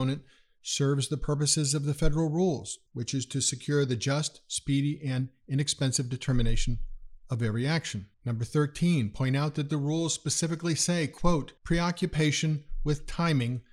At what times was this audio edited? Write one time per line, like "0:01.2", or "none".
0:02.9
0:08.1
0:11.6